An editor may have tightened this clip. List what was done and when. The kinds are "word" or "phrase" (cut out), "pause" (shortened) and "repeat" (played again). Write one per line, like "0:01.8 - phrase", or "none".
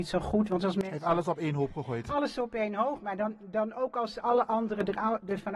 none